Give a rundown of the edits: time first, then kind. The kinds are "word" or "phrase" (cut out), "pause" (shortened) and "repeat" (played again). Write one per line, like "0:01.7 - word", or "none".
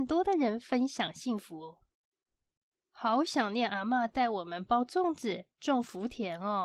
none